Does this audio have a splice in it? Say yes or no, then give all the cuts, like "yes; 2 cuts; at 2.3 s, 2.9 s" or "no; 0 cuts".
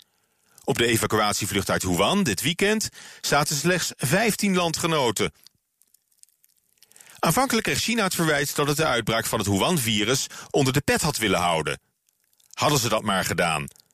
no; 0 cuts